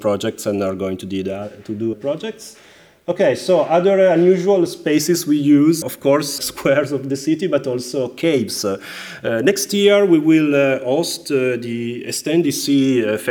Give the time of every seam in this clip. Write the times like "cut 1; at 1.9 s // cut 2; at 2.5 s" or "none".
cut 1; at 1.9 s // cut 2; at 5.8 s // cut 3; at 6.4 s